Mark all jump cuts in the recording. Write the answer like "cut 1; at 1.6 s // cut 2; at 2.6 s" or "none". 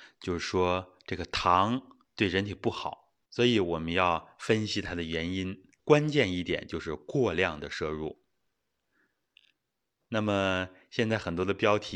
cut 1; at 3.2 s // cut 2; at 5.8 s